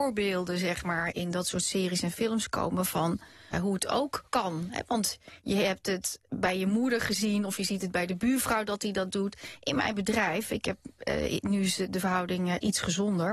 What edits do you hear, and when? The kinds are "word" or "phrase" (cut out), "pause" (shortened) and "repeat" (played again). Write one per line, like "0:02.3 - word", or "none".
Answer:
0:01.1 - word
0:03.5 - word
0:04.3 - pause